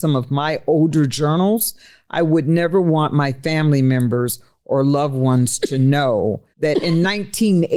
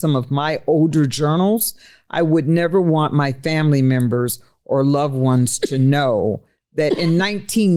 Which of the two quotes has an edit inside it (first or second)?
first